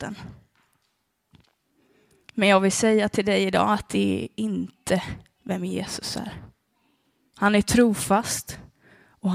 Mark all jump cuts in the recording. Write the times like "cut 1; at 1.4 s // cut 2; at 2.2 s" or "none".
none